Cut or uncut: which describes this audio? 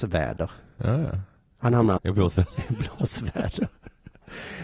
cut